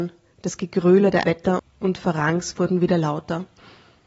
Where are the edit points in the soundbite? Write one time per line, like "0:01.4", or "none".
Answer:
0:01.2
0:01.6

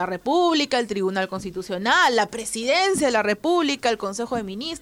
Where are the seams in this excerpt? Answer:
none

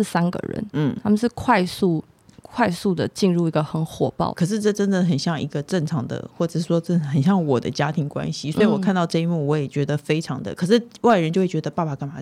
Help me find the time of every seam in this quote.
0:04.3

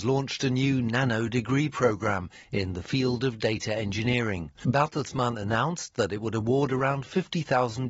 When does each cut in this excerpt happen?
0:04.5

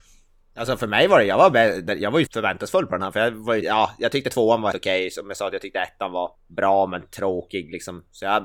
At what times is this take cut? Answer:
0:02.3
0:03.6
0:04.7
0:06.3

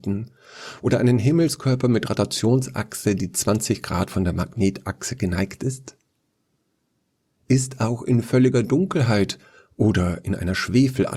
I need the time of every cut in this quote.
none

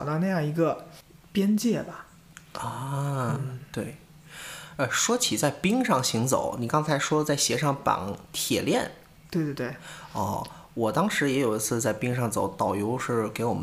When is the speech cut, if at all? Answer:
none

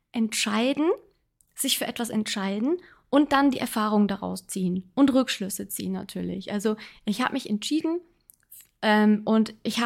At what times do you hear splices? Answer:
none

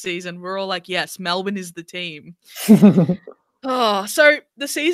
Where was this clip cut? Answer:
none

